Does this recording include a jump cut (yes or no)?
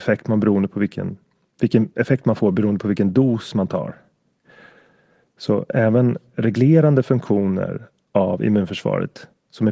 no